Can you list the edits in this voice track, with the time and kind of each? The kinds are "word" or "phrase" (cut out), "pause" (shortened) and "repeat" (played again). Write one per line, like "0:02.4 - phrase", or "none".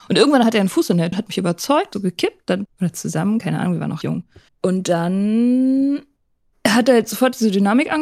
0:01.1 - word
0:01.9 - phrase
0:02.7 - phrase
0:04.0 - word
0:04.5 - pause